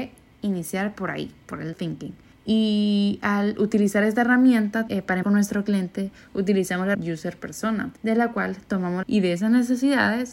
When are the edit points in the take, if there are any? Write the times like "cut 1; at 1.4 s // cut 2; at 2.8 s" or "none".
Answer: cut 1; at 1.7 s // cut 2; at 2.3 s // cut 3; at 4.9 s // cut 4; at 5.2 s // cut 5; at 6.9 s // cut 6; at 8.0 s // cut 7; at 9.0 s